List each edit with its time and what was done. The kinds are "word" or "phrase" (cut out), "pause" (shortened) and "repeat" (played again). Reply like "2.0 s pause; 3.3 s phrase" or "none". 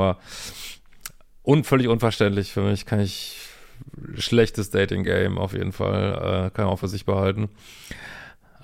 none